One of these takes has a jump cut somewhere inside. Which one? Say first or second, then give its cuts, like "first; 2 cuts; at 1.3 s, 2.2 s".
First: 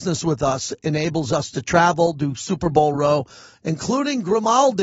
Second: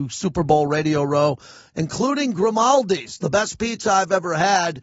first; 1 cut; at 2.9 s